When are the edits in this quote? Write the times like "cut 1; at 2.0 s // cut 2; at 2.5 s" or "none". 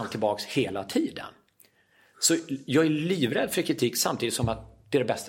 none